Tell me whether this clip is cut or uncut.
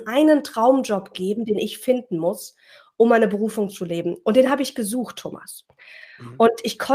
uncut